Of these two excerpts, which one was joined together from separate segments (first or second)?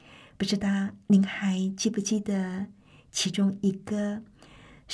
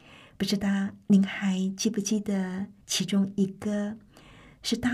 second